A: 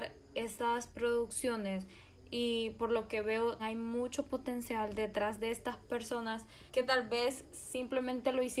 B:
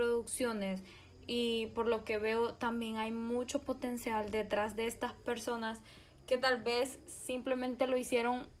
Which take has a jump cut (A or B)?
A